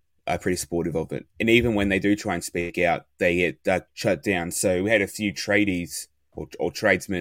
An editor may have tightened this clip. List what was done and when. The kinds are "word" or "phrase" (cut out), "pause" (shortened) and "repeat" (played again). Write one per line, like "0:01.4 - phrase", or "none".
0:03.9 - pause